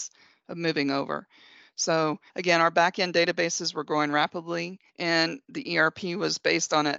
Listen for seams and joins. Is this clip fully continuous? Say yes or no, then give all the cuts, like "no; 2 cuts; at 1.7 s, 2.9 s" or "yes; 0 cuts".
no; 2 cuts; at 2.3 s, 4.9 s